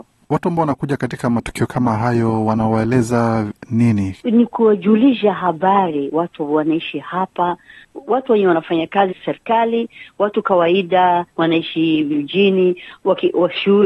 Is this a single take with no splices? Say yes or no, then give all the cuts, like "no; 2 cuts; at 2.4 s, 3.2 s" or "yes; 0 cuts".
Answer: no; 2 cuts; at 9.1 s, 11.3 s